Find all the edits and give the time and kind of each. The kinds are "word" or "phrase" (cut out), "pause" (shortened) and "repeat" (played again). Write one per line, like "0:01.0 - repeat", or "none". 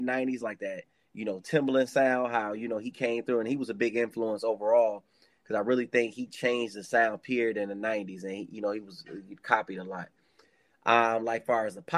none